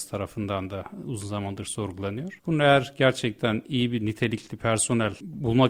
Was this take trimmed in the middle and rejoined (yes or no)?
no